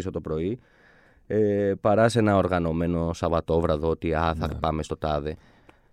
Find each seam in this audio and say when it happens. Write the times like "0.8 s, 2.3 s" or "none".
none